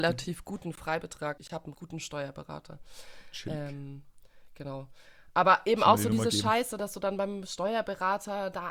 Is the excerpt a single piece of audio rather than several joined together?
no; 2 cuts; at 1.4 s, 1.7 s

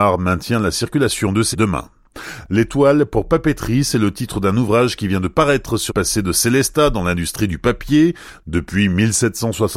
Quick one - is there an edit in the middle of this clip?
yes; 2 cuts; at 1.5 s, 5.9 s

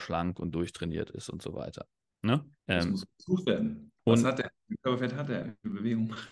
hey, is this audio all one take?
no; 2 cuts; at 2.6 s, 4.0 s

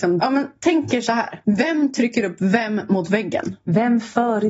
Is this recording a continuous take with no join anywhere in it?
yes; 0 cuts

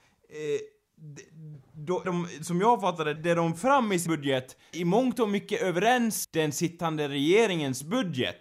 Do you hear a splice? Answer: yes; 6 cuts; at 2.0 s, 3.2 s, 3.6 s, 4.1 s, 4.7 s, 6.2 s

